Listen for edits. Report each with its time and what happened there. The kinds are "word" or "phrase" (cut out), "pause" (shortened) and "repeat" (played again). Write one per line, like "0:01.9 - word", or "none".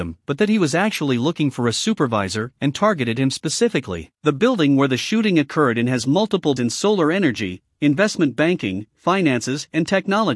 0:04.1 - pause
0:06.6 - word